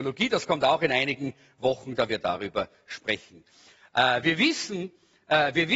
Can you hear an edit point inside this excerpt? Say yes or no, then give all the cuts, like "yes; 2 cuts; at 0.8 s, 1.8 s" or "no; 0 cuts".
yes; 1 cut; at 2.1 s